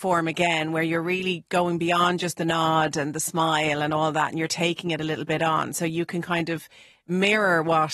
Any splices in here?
no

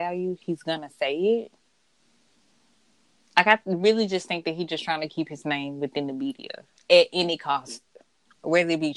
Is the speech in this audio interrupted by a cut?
no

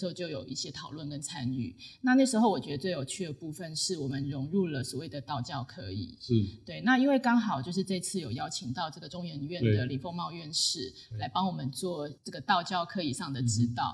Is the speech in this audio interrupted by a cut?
yes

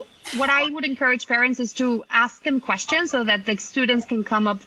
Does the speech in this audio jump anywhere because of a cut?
no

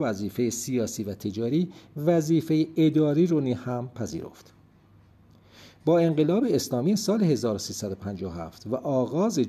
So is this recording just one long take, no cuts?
yes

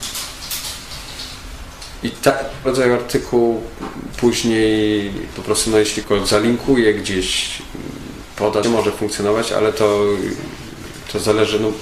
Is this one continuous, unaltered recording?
no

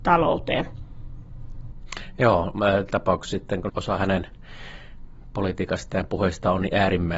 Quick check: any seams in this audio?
yes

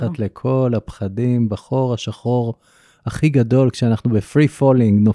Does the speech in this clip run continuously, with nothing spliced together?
yes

